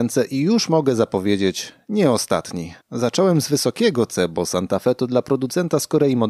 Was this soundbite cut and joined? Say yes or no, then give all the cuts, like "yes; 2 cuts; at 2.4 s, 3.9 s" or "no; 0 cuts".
yes; 1 cut; at 2.8 s